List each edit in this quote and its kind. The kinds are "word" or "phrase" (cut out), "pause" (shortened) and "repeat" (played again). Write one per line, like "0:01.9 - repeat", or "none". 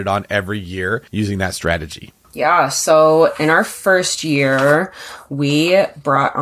0:01.1 - pause